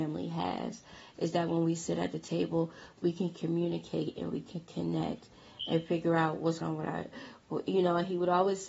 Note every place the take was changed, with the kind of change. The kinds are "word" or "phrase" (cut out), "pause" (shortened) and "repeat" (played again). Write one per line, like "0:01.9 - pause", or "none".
0:06.6 - word